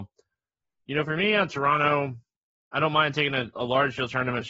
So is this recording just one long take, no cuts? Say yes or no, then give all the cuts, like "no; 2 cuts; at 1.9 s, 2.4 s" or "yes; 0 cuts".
no; 1 cut; at 3.5 s